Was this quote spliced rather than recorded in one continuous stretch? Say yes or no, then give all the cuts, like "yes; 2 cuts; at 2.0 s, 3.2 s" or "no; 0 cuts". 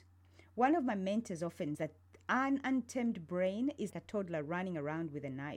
yes; 2 cuts; at 1.8 s, 3.9 s